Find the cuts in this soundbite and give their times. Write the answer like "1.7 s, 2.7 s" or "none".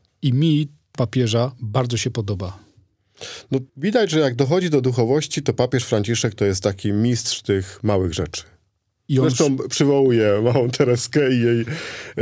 0.9 s, 3.7 s